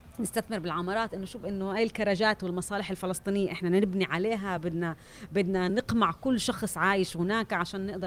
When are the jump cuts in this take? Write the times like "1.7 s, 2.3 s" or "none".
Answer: none